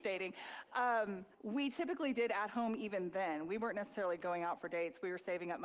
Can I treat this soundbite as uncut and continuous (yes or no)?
no